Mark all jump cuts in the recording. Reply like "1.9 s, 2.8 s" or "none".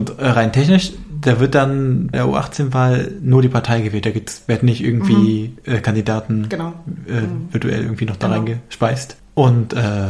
2.1 s

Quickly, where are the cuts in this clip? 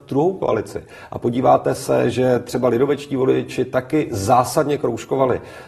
none

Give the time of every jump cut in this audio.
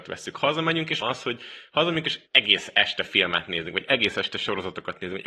1.0 s, 2.3 s

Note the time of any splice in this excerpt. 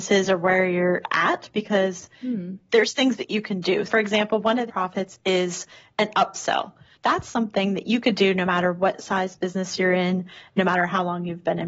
3.9 s, 4.7 s, 6.9 s

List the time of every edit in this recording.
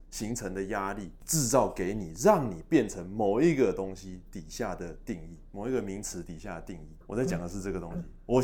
5.5 s, 7.0 s

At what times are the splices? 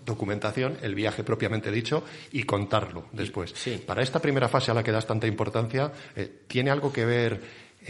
none

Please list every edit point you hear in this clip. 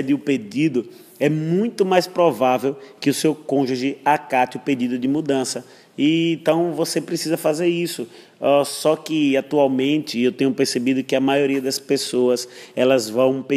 none

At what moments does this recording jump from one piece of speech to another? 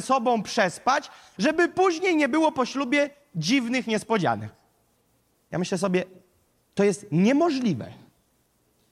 none

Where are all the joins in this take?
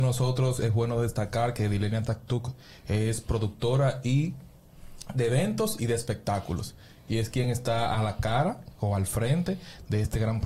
none

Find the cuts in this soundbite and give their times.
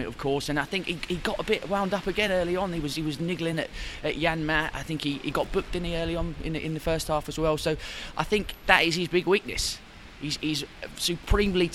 none

